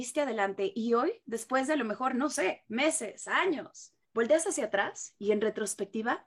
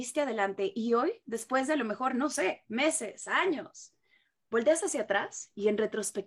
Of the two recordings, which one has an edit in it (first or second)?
first